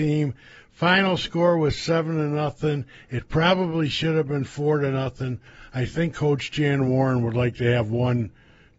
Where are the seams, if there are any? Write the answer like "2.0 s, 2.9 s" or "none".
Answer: none